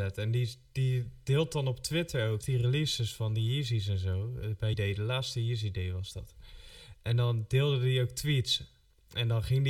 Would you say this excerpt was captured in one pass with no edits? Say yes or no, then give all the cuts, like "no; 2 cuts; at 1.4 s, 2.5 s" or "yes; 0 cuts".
no; 2 cuts; at 2.4 s, 4.7 s